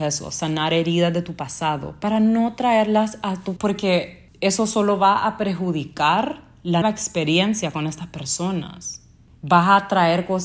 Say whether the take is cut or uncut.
cut